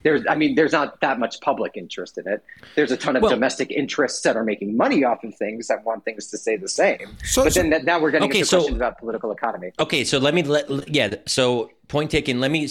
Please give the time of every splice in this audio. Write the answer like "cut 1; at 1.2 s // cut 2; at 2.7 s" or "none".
none